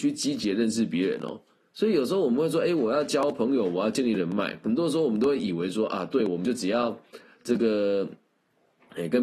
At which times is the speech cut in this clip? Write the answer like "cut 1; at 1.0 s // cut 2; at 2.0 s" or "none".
none